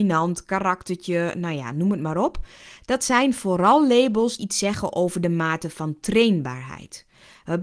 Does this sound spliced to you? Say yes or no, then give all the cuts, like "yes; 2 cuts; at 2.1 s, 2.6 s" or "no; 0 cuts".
yes; 1 cut; at 4.4 s